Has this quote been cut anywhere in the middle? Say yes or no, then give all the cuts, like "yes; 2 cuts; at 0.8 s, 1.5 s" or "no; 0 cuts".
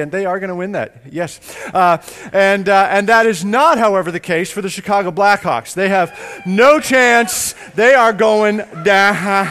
no; 0 cuts